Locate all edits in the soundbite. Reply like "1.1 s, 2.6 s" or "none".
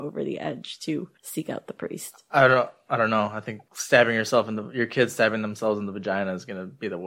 1.2 s